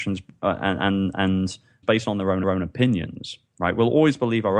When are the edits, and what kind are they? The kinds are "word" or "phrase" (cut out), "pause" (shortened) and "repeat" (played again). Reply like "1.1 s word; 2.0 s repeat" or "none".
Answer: 1.8 s phrase; 2.4 s repeat